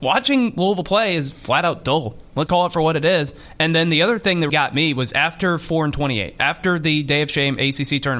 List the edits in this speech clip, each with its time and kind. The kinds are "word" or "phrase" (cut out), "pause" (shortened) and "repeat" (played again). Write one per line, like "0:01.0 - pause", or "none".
0:02.5 - word
0:04.5 - word